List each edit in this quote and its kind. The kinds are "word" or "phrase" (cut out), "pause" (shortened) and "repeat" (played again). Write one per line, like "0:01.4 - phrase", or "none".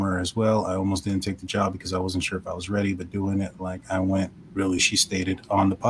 0:04.8 - word